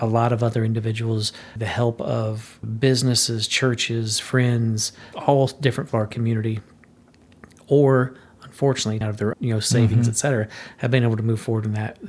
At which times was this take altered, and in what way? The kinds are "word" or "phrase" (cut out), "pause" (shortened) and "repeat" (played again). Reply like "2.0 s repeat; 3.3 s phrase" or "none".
1.6 s word; 2.6 s word; 5.1 s word; 5.9 s word; 9.0 s word; 9.3 s word